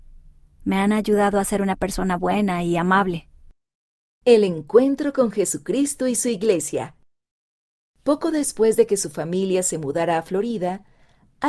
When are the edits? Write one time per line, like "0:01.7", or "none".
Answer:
none